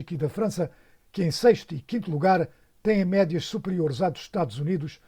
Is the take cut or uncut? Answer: uncut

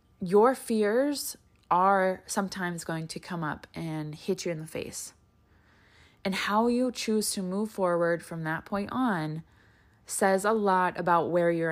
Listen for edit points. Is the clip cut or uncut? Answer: uncut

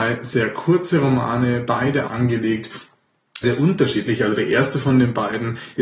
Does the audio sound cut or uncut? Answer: cut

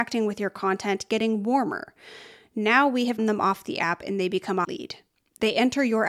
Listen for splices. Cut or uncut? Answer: cut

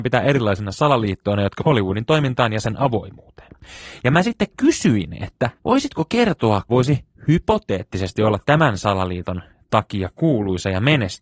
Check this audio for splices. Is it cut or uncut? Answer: cut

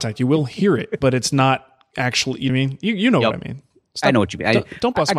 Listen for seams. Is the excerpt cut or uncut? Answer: cut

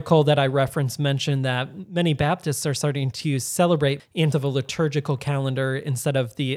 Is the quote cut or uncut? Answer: cut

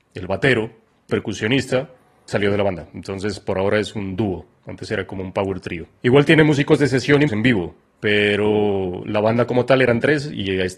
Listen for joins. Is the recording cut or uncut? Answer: cut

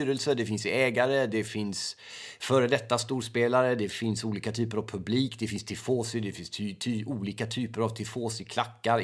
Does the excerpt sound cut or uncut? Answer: uncut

